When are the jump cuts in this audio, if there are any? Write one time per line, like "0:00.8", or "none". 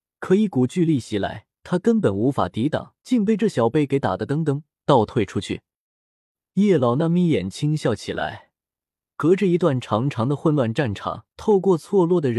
0:01.5
0:03.0
0:11.3